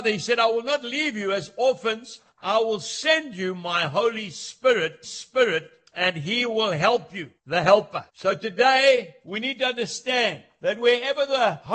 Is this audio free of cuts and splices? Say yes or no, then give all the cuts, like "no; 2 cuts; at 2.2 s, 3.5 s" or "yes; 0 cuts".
no; 2 cuts; at 5.0 s, 8.1 s